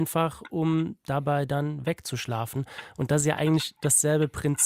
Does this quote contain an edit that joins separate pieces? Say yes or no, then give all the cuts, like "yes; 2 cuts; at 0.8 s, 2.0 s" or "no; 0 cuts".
no; 0 cuts